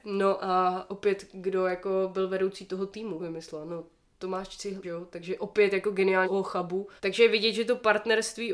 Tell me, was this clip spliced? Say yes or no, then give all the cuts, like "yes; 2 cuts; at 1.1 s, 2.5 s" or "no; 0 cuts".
yes; 4 cuts; at 3.2 s, 4.8 s, 6.2 s, 7.0 s